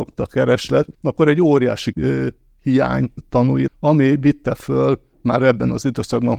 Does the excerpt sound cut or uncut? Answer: cut